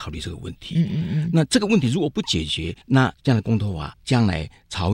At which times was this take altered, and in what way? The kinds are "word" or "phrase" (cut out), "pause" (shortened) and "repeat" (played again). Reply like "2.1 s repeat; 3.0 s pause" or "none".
2.8 s pause